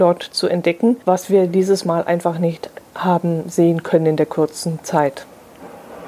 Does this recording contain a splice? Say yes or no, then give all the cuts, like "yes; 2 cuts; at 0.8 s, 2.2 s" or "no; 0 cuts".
yes; 1 cut; at 1.0 s